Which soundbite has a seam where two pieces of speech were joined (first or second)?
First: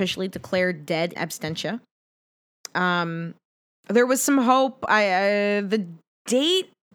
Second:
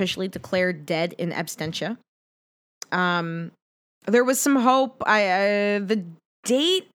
first